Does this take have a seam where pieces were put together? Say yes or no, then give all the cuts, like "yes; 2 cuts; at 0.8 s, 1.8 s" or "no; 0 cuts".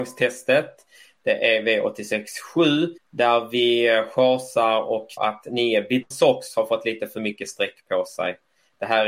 yes; 3 cuts; at 3.0 s, 5.2 s, 6.1 s